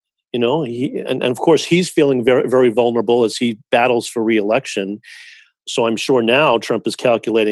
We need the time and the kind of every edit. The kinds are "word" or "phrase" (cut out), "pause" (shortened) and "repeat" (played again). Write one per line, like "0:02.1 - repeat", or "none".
none

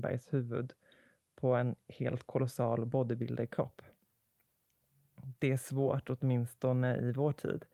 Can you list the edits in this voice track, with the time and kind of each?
none

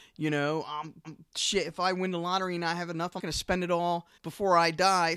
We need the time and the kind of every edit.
0:01.0 - repeat
0:03.2 - word
0:04.2 - pause

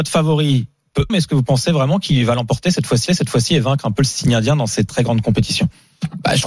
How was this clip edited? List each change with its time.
0:01.1 - word
0:03.1 - repeat
0:04.9 - word

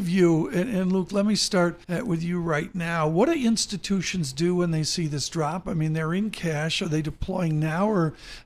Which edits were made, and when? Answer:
0:01.8 - pause

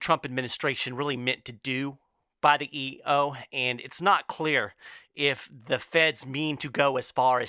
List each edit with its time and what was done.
none

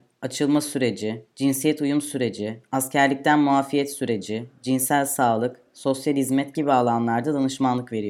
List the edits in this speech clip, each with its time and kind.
none

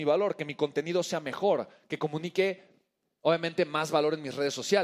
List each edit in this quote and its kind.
none

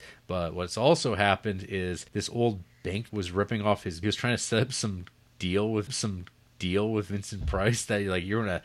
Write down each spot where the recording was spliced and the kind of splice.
0:02.1 - pause
0:03.1 - word
0:04.0 - phrase
0:05.9 - repeat

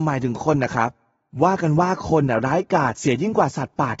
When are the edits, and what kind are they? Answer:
none

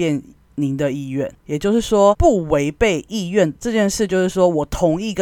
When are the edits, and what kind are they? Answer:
0:01.4 - pause

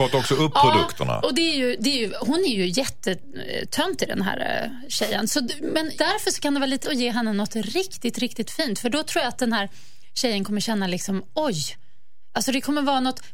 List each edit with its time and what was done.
0:05.9 - word
0:06.8 - word

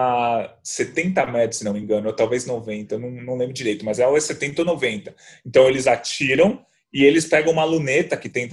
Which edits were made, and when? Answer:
none

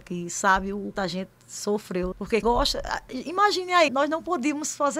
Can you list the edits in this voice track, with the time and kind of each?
0:00.9 - word
0:02.1 - word
0:02.4 - word
0:03.9 - word

